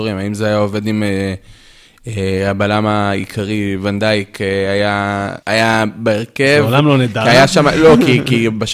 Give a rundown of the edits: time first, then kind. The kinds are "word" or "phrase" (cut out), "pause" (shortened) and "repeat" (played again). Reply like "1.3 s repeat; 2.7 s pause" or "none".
5.4 s pause